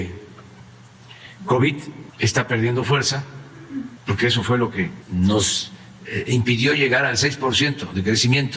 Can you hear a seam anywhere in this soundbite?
yes; 3 cuts; at 2.1 s, 4.0 s, 5.0 s

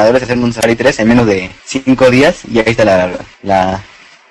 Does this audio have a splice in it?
yes; 2 cuts; at 1.6 s, 3.3 s

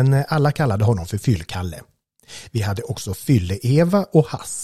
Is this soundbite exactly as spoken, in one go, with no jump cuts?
yes; 0 cuts

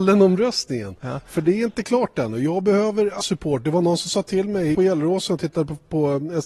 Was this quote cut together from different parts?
yes; 2 cuts; at 3.2 s, 4.7 s

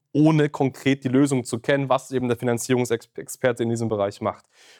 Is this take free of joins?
yes; 0 cuts

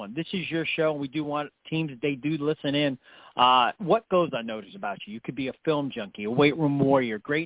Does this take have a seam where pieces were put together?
no; 0 cuts

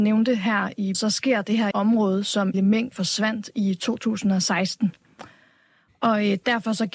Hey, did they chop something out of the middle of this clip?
yes; 4 cuts; at 0.9 s, 1.7 s, 2.5 s, 2.9 s

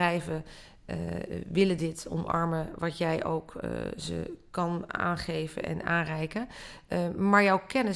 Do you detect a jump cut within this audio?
no; 0 cuts

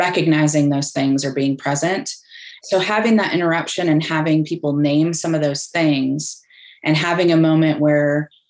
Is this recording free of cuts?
yes; 0 cuts

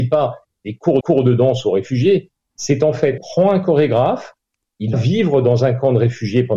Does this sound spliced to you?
yes; 3 cuts; at 1.0 s, 3.2 s, 4.9 s

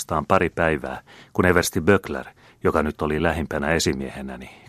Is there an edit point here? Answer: no; 0 cuts

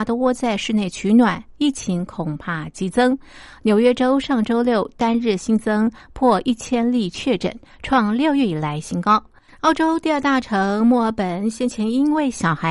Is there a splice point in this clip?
no; 0 cuts

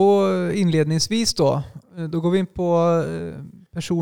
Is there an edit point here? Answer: no; 0 cuts

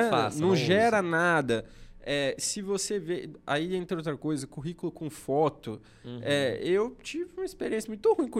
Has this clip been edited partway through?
no; 0 cuts

